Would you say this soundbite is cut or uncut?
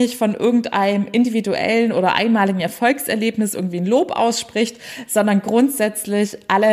uncut